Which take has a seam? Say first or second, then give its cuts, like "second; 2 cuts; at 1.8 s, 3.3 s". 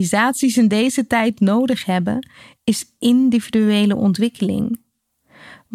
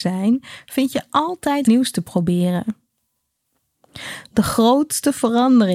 second; 1 cut; at 1.6 s